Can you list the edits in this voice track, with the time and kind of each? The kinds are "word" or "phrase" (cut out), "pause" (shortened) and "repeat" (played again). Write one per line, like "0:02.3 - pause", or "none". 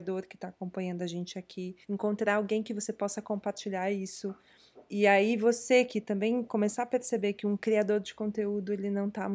0:01.8 - pause